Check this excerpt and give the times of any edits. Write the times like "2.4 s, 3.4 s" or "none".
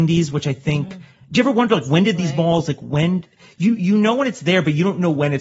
none